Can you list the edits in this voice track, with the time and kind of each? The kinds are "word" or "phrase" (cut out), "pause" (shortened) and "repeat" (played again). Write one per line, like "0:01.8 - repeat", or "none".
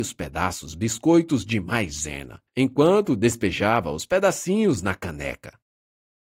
0:02.5 - pause